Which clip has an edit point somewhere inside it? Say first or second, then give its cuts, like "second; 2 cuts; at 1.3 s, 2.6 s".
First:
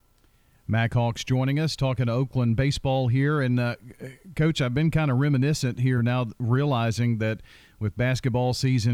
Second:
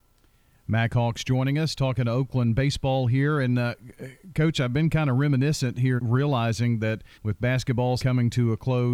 second; 3 cuts; at 6.0 s, 7.1 s, 8.0 s